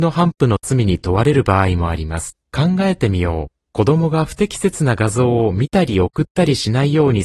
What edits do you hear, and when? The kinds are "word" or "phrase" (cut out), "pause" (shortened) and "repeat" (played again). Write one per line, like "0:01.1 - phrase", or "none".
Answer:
0:02.4 - pause
0:03.7 - pause